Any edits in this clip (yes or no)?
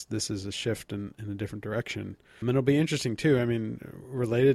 yes